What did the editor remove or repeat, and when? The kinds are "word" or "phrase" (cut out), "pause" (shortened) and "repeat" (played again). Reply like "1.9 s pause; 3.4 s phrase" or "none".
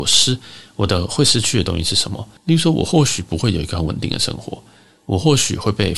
2.4 s pause